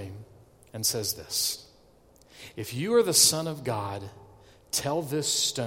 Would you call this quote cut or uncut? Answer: uncut